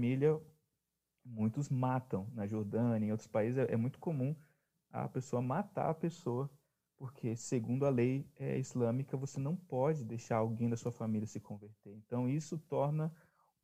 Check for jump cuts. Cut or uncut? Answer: uncut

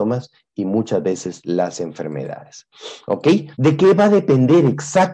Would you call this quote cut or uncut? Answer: cut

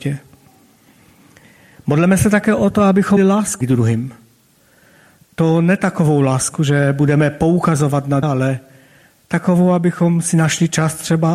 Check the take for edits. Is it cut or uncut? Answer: cut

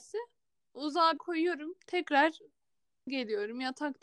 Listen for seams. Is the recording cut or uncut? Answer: cut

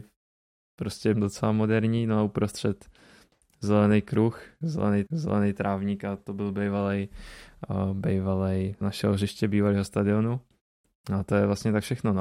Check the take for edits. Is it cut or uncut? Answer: cut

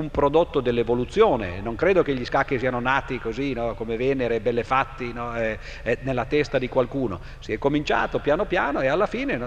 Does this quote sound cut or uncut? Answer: uncut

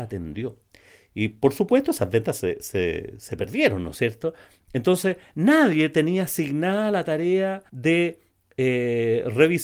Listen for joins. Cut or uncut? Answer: cut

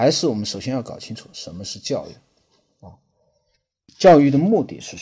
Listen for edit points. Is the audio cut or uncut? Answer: uncut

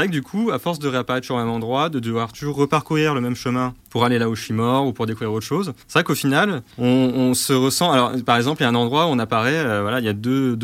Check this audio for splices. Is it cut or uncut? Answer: cut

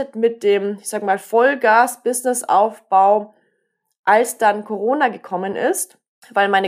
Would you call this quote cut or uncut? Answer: uncut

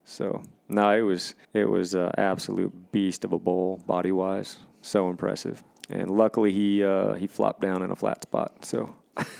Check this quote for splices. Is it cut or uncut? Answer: cut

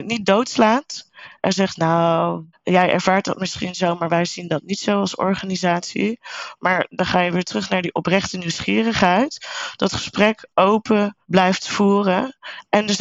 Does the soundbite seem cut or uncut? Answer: cut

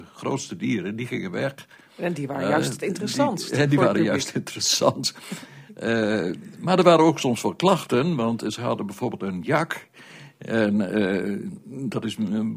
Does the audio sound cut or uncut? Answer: uncut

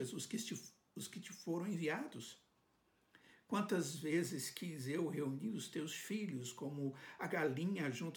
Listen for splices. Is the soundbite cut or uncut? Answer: uncut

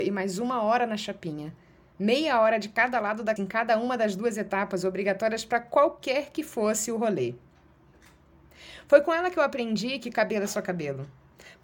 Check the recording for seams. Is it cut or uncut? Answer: cut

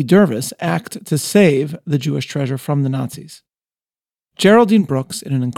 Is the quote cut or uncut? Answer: uncut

